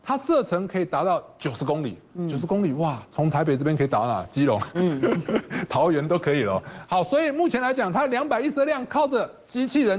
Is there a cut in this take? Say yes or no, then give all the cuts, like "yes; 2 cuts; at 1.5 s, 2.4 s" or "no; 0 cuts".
yes; 1 cut; at 3.1 s